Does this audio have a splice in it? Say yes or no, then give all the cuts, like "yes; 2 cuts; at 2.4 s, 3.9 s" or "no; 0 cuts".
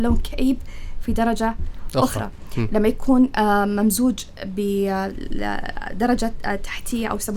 no; 0 cuts